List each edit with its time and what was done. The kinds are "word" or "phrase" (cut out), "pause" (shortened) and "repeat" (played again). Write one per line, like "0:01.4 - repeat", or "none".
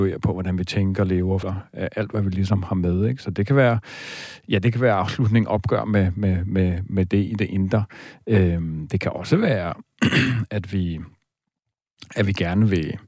0:01.4 - word